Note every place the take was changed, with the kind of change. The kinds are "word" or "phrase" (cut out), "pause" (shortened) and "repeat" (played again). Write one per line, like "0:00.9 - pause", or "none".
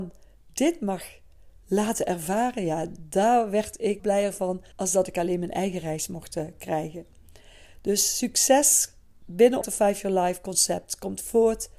0:04.0 - word
0:04.7 - pause
0:09.6 - phrase